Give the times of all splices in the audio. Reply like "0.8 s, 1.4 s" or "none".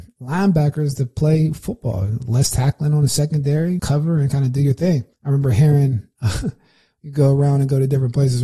3.8 s, 5.1 s

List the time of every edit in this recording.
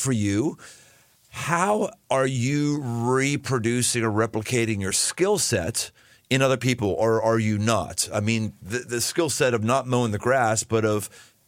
none

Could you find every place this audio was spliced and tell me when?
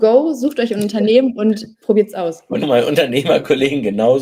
1.7 s, 2.6 s

